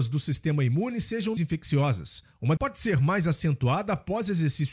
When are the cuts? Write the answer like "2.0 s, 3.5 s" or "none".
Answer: 1.4 s, 2.6 s